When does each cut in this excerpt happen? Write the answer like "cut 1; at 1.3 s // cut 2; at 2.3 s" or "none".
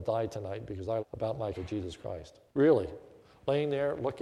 cut 1; at 1.0 s // cut 2; at 1.5 s // cut 3; at 2.5 s